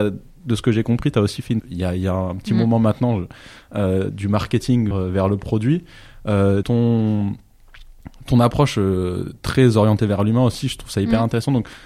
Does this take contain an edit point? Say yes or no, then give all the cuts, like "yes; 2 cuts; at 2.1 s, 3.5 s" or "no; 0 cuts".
yes; 4 cuts; at 1.6 s, 4.1 s, 4.9 s, 6.6 s